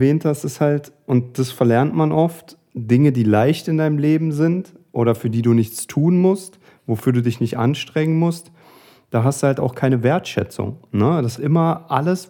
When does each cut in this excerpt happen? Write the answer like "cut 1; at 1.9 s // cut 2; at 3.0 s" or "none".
cut 1; at 11.4 s